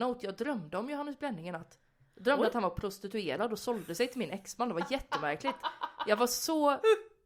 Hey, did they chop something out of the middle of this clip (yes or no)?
no